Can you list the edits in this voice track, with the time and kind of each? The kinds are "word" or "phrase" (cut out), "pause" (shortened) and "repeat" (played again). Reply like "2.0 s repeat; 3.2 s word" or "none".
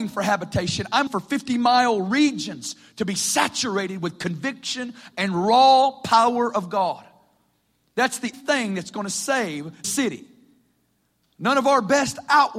1.1 s word; 8.3 s word; 9.8 s word

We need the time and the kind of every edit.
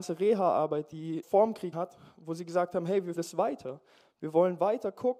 1.2 s word; 1.7 s word; 3.2 s word

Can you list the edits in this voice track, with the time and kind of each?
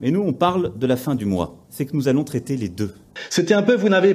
1.6 s pause

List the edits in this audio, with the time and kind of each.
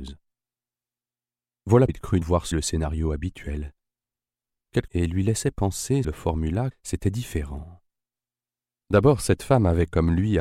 1.9 s word; 2.2 s word; 2.5 s word; 4.9 s phrase; 6.0 s phrase; 6.7 s phrase

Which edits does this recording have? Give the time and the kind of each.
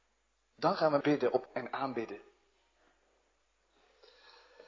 1.0 s word; 1.5 s word

